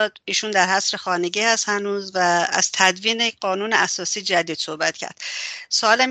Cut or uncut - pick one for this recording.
uncut